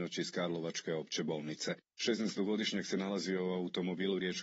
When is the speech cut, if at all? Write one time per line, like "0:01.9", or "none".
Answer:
none